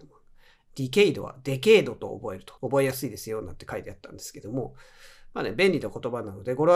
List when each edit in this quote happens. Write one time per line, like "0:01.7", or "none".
0:02.6